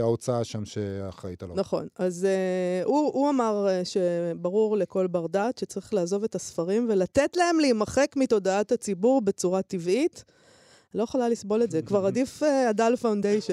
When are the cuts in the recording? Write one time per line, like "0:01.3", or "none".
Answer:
none